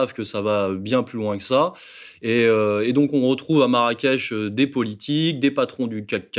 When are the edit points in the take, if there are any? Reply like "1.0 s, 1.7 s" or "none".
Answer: none